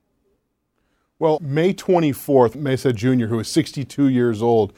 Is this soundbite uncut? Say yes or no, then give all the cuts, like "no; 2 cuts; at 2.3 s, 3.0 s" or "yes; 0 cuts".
no; 2 cuts; at 1.4 s, 2.5 s